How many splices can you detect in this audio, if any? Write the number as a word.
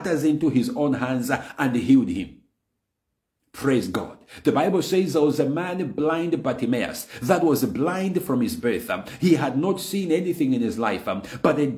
zero